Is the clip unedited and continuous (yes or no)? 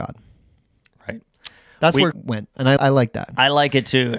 no